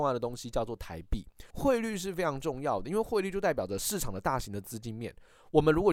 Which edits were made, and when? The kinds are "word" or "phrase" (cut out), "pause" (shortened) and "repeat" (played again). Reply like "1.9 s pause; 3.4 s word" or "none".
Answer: 1.5 s pause